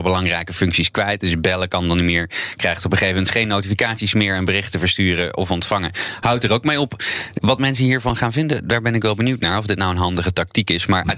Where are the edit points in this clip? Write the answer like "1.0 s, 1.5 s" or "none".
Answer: 7.4 s